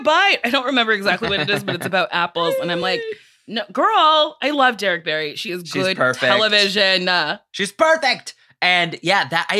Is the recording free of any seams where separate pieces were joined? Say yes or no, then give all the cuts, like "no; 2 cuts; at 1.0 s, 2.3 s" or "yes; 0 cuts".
yes; 0 cuts